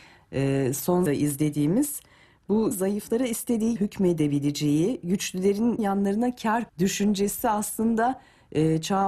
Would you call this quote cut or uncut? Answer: cut